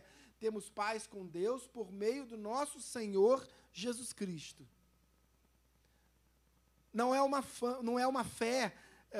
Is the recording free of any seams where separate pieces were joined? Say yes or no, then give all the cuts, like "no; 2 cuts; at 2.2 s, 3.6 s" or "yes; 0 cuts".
yes; 0 cuts